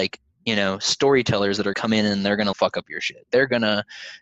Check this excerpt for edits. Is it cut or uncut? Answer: cut